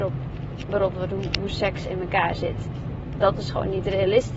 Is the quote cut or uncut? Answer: cut